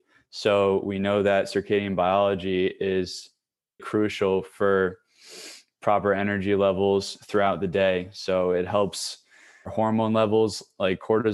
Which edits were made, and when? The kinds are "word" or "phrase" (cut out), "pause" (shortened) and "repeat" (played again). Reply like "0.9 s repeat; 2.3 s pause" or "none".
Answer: 3.8 s word; 9.7 s word